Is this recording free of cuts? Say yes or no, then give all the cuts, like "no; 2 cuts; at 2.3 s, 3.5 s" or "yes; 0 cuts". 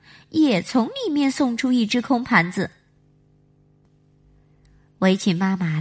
yes; 0 cuts